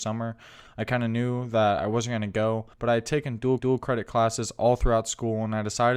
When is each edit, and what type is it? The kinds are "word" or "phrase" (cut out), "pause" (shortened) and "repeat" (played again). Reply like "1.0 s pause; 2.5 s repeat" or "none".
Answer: 2.7 s pause; 3.6 s repeat

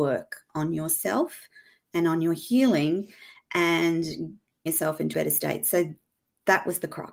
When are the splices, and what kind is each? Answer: 4.7 s word; 5.1 s word

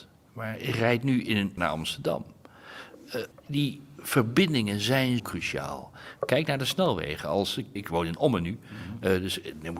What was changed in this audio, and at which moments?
1.6 s word; 3.3 s word; 5.2 s word; 7.8 s word

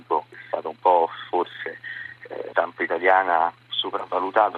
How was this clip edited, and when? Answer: 2.5 s word

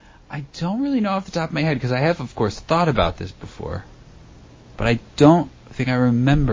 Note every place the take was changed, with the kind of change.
none

